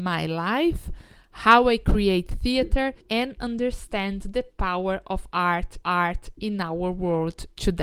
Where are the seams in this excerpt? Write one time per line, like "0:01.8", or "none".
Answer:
0:03.0
0:05.8